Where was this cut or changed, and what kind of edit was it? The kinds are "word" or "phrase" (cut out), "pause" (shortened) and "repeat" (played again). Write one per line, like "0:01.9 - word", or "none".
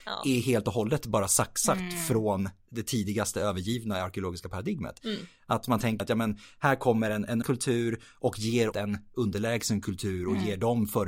0:06.0 - word
0:07.4 - word
0:08.7 - word